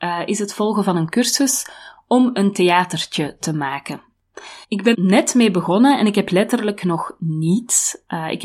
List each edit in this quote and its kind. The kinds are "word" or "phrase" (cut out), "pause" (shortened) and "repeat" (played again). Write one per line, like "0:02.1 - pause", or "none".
0:04.6 - pause
0:04.9 - word